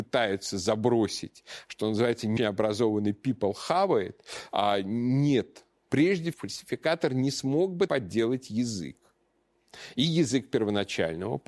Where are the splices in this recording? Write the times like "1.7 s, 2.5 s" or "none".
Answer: 2.4 s, 6.3 s, 7.9 s